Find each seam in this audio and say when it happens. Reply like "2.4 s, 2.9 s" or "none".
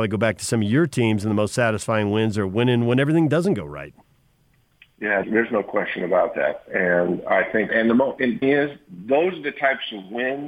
5.2 s, 7.7 s, 8.4 s